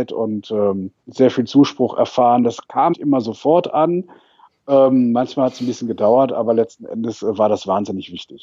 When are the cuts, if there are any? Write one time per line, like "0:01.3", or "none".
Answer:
0:02.9